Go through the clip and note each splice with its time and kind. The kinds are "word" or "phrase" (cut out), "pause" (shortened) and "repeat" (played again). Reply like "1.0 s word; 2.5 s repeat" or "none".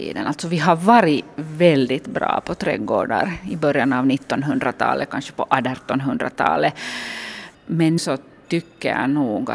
8.0 s word